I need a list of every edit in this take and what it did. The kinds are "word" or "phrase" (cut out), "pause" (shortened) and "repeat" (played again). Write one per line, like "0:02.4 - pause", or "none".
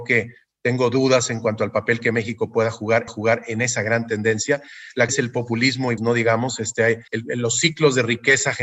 0:03.1 - repeat
0:05.1 - phrase
0:06.0 - word
0:07.1 - pause